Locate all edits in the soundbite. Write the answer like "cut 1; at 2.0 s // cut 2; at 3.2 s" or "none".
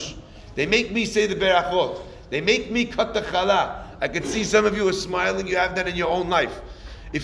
none